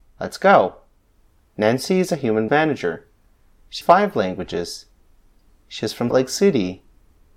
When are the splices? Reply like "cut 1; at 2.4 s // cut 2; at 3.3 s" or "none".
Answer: cut 1; at 2.5 s // cut 2; at 3.8 s // cut 3; at 6.1 s

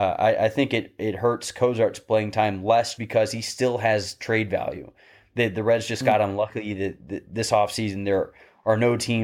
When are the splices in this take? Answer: cut 1; at 3.0 s

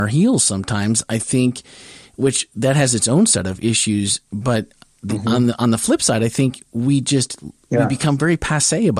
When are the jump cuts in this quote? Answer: none

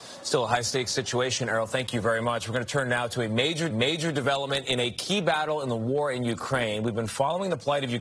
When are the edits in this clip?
cut 1; at 3.7 s

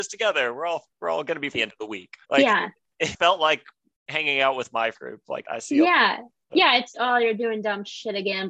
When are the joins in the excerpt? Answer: cut 1; at 1.5 s // cut 2; at 2.2 s // cut 3; at 3.1 s // cut 4; at 4.9 s // cut 5; at 5.4 s // cut 6; at 6.5 s // cut 7; at 6.9 s

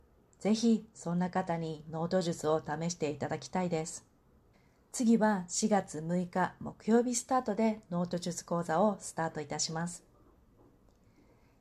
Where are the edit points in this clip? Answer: cut 1; at 4.5 s

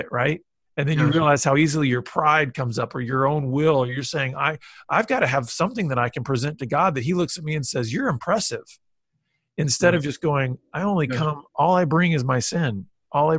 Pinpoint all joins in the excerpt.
none

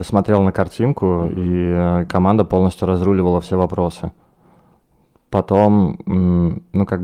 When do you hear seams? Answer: none

